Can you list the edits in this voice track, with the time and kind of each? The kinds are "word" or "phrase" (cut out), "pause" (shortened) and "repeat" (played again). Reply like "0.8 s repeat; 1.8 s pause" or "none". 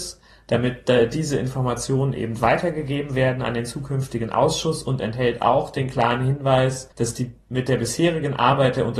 6.9 s pause; 7.4 s pause